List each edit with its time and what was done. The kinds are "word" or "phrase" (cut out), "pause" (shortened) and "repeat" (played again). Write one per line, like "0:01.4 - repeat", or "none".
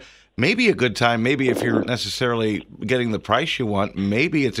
0:01.8 - word